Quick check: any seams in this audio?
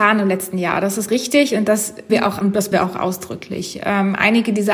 yes; 4 cuts; at 1.1 s, 2.1 s, 2.4 s, 2.7 s

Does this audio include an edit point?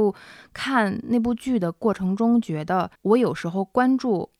yes; 1 cut; at 3.0 s

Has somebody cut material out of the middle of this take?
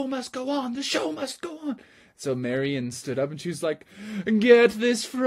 no; 0 cuts

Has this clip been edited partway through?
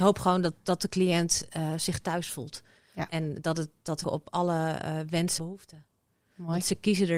yes; 2 cuts; at 4.0 s, 5.4 s

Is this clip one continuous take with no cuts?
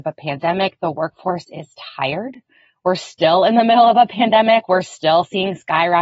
yes; 0 cuts

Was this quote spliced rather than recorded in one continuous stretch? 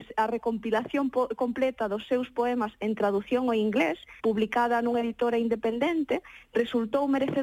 yes; 1 cut; at 4.2 s

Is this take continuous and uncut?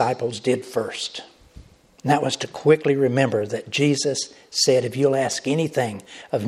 yes; 0 cuts

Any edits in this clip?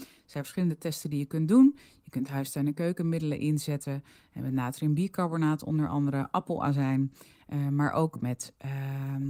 no; 0 cuts

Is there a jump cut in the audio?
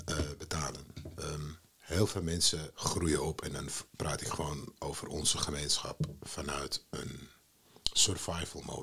yes; 2 cuts; at 1.7 s, 2.7 s

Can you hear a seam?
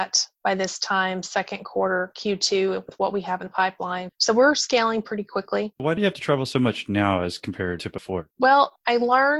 no; 0 cuts

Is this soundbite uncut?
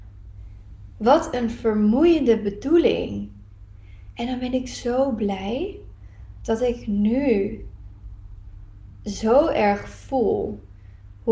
yes; 0 cuts

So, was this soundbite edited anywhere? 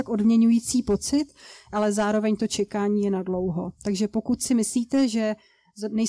no; 0 cuts

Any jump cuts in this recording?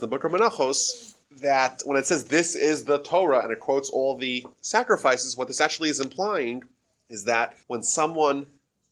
yes; 4 cuts; at 1.2 s, 4.5 s, 6.8 s, 7.6 s

